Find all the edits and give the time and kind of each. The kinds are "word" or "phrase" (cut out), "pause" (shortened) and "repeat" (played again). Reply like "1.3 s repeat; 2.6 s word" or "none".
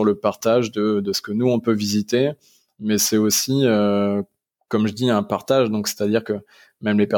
none